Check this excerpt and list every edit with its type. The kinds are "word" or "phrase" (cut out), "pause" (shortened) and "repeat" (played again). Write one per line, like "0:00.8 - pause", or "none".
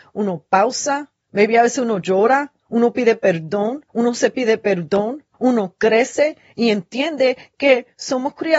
0:01.2 - pause
0:02.6 - pause
0:03.9 - pause
0:05.3 - pause

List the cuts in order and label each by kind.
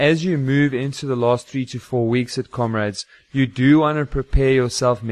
none

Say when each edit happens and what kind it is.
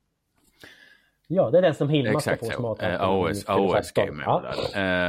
none

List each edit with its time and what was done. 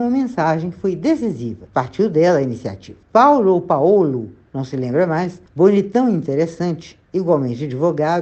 0:01.7 - pause
0:03.0 - pause
0:05.5 - pause

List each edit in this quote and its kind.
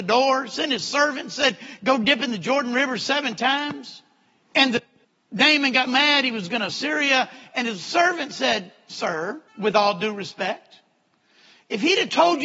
0:04.3 - pause
0:05.0 - pause
0:05.9 - word
0:06.7 - phrase
0:09.5 - pause

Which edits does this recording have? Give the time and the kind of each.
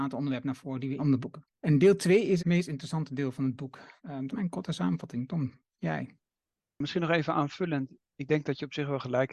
0:01.0 - phrase
0:01.5 - pause
0:02.4 - word
0:04.0 - pause
0:04.3 - word

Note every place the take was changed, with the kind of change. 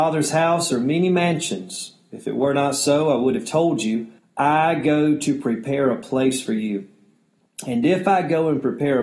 0:04.2 - pause

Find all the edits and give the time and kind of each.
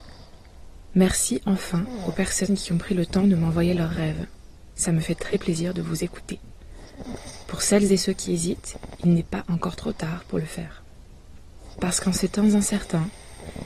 none

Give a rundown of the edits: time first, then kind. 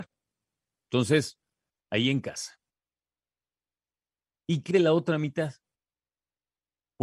0:04.7 - word

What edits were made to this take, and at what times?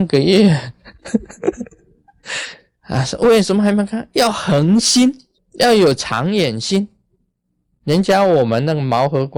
0:05.4 - pause

